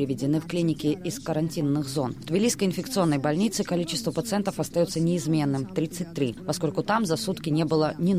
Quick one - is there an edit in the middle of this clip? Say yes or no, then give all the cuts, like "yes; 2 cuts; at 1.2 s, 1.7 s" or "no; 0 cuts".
no; 0 cuts